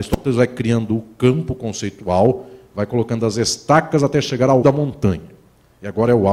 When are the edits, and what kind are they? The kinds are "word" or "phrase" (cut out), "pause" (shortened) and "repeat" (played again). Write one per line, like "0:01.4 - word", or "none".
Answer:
0:04.6 - word